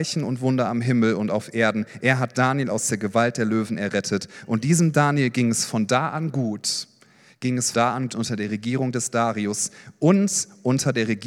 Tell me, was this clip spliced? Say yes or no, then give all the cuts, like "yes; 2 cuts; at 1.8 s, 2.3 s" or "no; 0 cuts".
yes; 2 cuts; at 7.7 s, 8.1 s